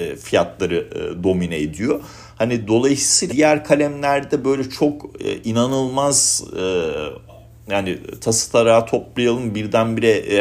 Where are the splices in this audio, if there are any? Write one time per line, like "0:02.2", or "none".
0:03.3